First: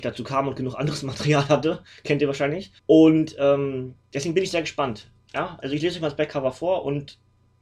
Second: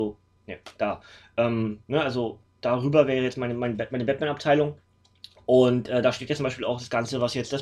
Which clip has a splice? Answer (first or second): first